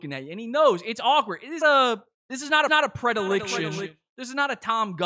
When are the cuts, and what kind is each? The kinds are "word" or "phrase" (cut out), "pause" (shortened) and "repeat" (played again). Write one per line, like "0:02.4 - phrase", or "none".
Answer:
0:01.6 - phrase
0:02.7 - repeat